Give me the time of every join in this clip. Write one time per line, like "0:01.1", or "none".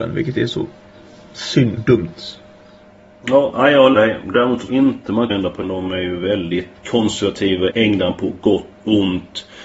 0:01.8
0:03.9
0:04.7
0:05.3
0:05.6
0:06.8
0:07.7
0:08.7